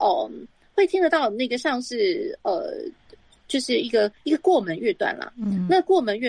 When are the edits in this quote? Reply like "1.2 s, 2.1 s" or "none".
none

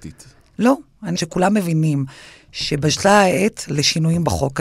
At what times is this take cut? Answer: 1.1 s

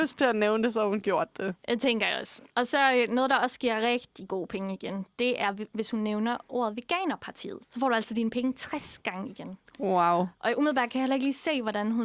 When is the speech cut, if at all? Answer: 2.5 s, 7.6 s

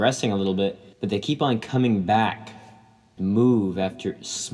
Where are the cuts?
0.9 s, 3.2 s

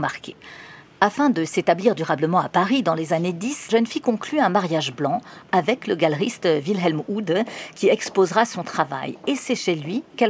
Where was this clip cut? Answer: 3.7 s

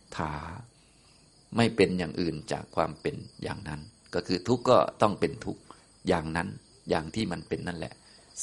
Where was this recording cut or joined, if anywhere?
3.3 s

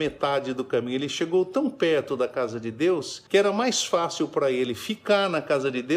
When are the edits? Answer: 3.3 s

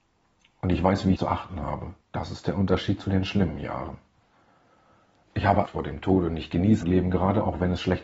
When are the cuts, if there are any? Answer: 1.2 s, 2.0 s, 5.7 s, 6.8 s

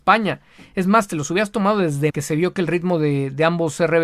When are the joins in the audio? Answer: 2.1 s

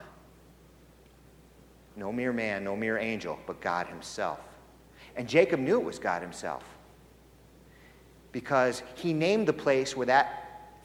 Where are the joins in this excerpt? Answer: none

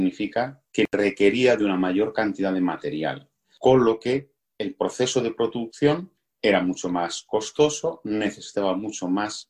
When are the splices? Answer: none

